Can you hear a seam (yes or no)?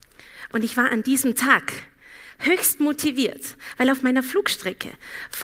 no